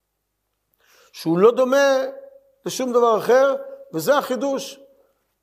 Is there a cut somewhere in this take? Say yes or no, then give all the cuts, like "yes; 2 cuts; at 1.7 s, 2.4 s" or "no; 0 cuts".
no; 0 cuts